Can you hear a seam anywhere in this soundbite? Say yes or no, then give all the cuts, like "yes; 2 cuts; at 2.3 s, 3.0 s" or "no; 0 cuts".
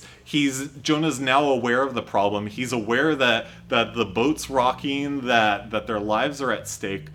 no; 0 cuts